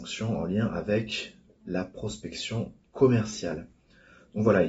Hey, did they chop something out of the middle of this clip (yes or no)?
no